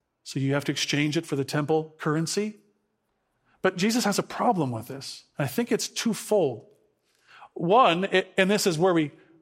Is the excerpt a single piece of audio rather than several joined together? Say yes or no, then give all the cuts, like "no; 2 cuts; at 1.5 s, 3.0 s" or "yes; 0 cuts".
yes; 0 cuts